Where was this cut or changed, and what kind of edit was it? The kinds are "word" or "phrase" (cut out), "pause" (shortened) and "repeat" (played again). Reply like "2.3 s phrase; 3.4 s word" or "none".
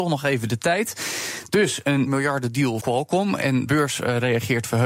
2.1 s word; 2.8 s word; 3.7 s word